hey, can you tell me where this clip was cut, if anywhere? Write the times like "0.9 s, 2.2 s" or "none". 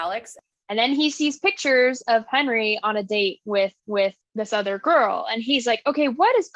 3.8 s

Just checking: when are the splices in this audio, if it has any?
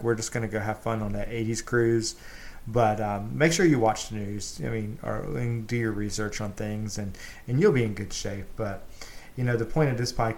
none

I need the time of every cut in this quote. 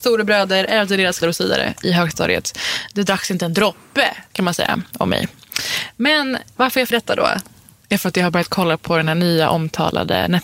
1.2 s, 4.3 s, 6.9 s

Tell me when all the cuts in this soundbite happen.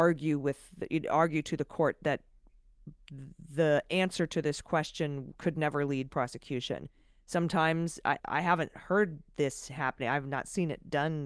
6.1 s, 8.2 s

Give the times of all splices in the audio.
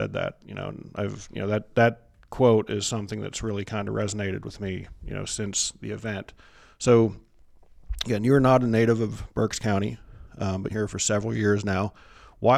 10.7 s

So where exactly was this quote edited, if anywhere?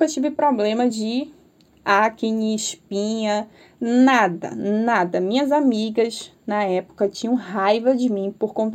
none

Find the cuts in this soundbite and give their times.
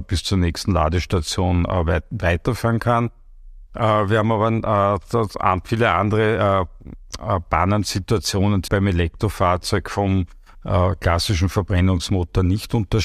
8.7 s

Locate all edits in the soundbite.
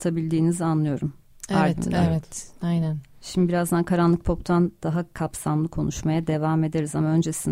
none

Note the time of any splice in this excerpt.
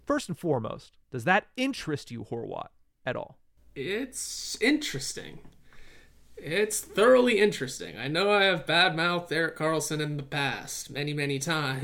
1.0 s

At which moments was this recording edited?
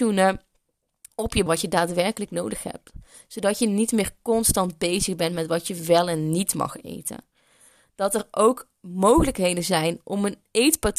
1.5 s

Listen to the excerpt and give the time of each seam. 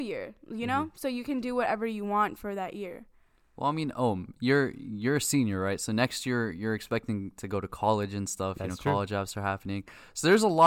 none

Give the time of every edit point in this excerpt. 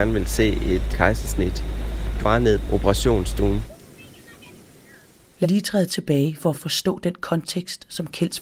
0.9 s, 2.2 s, 2.7 s, 5.4 s, 5.9 s, 6.5 s

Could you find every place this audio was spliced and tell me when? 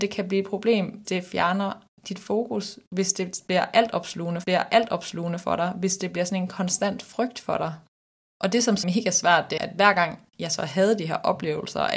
1.0 s, 4.4 s, 8.8 s, 9.6 s

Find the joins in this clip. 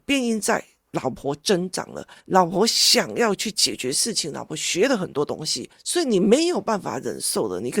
2.2 s

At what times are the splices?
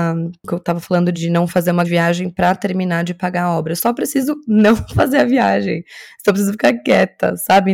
1.1 s, 1.8 s

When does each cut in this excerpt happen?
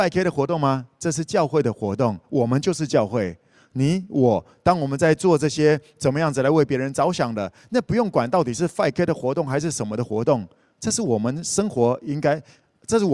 none

